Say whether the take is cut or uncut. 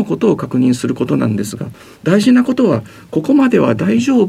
uncut